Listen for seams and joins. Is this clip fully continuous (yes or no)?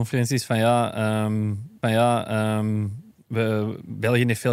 no